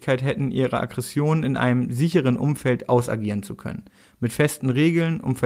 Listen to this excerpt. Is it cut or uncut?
uncut